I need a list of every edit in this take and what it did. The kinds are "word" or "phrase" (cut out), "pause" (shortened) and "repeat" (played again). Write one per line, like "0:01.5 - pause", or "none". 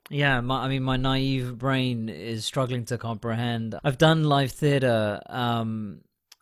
0:03.8 - word